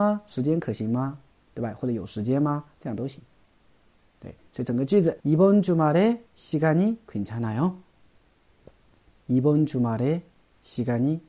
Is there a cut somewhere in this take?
yes; 2 cuts; at 5.2 s, 6.3 s

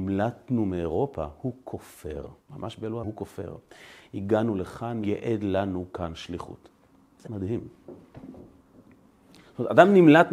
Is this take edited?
yes; 4 cuts; at 2.4 s, 3.0 s, 5.0 s, 7.3 s

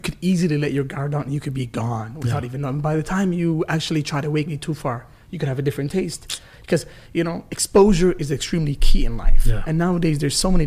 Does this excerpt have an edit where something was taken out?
yes; 1 cut; at 4.5 s

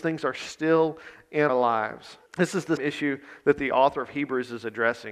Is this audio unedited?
no; 3 cuts; at 1.5 s, 2.3 s, 2.8 s

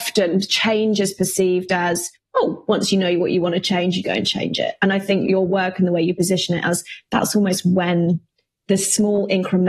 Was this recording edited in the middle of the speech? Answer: yes; 1 cut; at 4.0 s

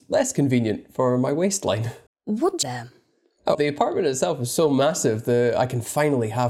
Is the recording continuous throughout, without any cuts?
no; 3 cuts; at 2.1 s, 2.6 s, 3.5 s

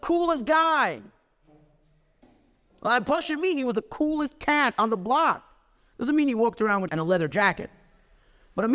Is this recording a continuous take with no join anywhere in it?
no; 1 cut; at 6.9 s

